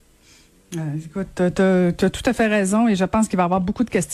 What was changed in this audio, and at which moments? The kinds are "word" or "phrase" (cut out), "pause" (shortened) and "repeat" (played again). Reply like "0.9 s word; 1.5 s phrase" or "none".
none